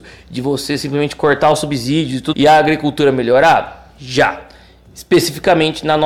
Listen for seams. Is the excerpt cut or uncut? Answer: cut